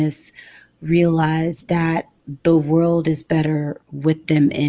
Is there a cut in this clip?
no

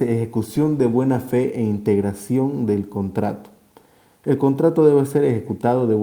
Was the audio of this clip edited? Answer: no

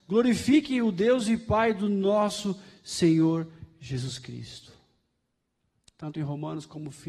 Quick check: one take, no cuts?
yes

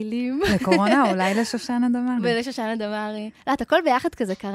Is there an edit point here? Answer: no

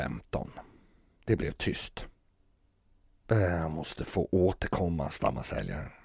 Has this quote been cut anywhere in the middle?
no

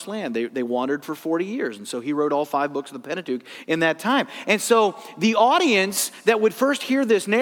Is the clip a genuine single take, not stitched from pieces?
yes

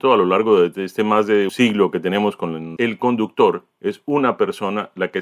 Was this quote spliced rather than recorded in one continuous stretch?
yes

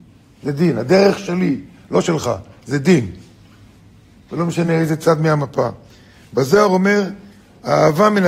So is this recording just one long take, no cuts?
yes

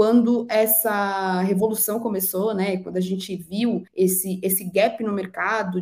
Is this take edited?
yes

